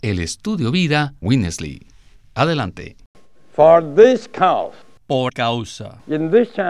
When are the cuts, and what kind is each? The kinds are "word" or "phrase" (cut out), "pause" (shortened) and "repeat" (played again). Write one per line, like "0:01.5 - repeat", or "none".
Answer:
0:01.2 - word
0:05.3 - word